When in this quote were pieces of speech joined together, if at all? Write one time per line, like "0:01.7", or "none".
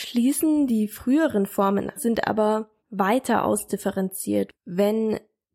0:02.0
0:02.8
0:04.5